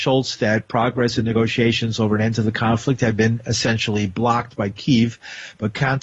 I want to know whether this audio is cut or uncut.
uncut